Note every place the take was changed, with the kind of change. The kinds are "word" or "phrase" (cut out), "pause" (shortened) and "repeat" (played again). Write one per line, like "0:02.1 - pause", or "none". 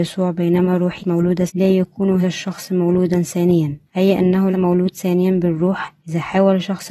0:01.0 - word
0:01.5 - word
0:02.2 - word
0:03.9 - pause
0:04.5 - word
0:06.0 - pause